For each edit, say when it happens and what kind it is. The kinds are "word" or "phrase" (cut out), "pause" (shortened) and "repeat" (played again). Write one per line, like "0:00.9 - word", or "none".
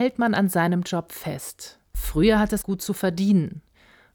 0:02.6 - word